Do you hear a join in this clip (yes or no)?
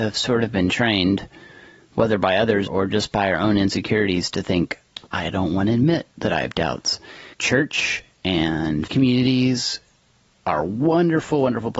yes